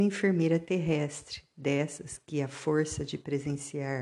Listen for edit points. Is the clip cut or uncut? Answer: uncut